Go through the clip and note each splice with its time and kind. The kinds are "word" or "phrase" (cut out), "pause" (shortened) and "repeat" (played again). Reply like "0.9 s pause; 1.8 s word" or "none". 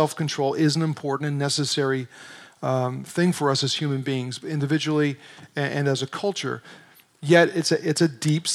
none